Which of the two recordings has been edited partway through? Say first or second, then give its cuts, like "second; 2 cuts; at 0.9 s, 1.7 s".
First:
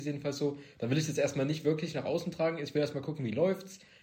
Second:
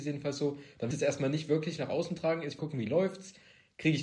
second; 2 cuts; at 0.9 s, 2.6 s